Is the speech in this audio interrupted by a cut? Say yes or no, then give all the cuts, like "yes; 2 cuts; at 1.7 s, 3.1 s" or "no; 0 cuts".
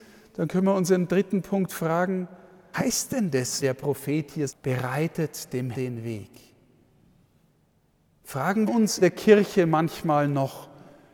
yes; 6 cuts; at 2.7 s, 3.6 s, 4.5 s, 5.7 s, 8.7 s, 9.0 s